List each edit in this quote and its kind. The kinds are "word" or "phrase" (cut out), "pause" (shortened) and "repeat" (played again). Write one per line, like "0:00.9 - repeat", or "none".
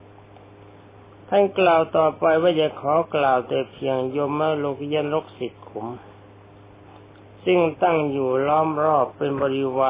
none